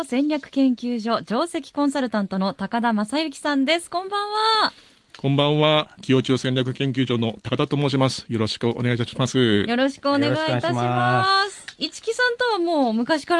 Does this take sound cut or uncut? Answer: uncut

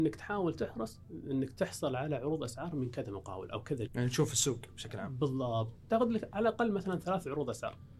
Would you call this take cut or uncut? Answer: cut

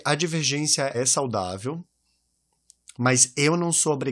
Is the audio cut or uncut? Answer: cut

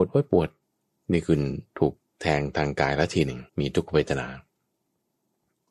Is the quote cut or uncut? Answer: cut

